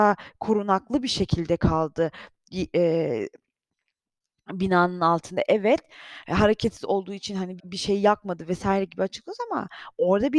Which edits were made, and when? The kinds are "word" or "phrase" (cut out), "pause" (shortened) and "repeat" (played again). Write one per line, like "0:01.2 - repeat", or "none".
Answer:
0:07.6 - word